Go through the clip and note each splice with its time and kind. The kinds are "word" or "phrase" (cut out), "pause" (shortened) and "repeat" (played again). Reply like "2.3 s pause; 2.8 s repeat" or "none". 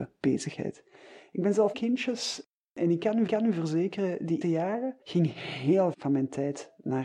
1.7 s phrase; 3.3 s repeat; 4.4 s word; 5.0 s pause; 5.9 s word

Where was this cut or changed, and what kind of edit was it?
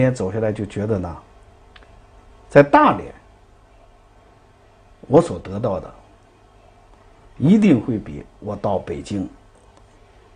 none

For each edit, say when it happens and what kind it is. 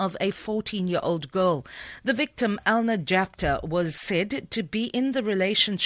none

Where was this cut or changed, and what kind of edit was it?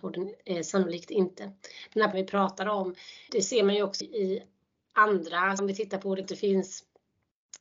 2.1 s word; 3.3 s word; 4.0 s word; 5.6 s word; 6.2 s word

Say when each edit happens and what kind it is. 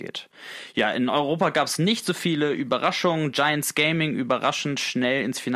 none

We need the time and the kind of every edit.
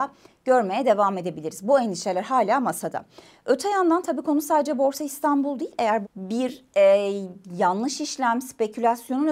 6.0 s word

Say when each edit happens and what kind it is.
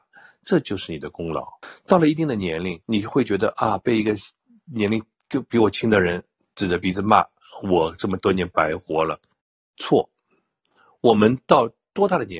2.8 s pause; 9.3 s pause

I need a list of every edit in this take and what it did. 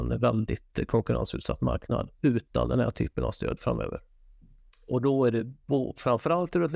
none

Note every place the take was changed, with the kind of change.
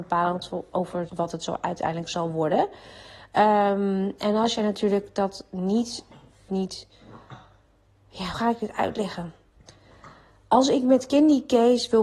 1.1 s word; 6.5 s phrase; 8.3 s word

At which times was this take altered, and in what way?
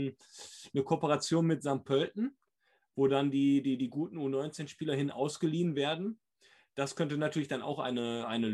none

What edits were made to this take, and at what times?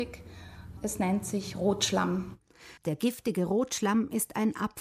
2.8 s pause

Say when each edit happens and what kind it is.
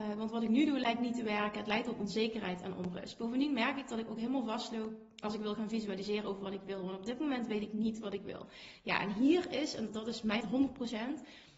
9.9 s word; 10.4 s word

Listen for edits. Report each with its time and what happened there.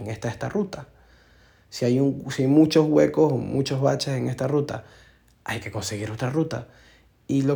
none

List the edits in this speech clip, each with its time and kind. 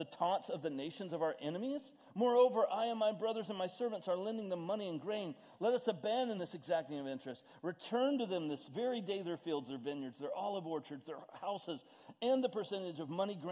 none

